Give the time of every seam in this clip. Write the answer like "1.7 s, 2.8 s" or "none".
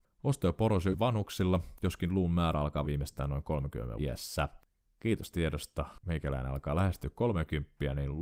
0.9 s, 2.8 s, 4.0 s, 5.3 s